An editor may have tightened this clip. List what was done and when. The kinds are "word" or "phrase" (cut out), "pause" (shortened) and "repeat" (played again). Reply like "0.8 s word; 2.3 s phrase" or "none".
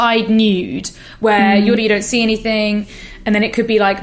1.8 s word